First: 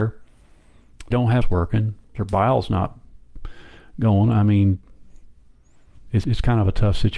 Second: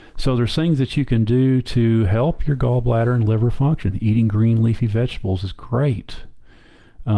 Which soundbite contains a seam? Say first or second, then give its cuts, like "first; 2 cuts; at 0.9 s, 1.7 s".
first; 4 cuts; at 1.1 s, 1.4 s, 2.0 s, 6.2 s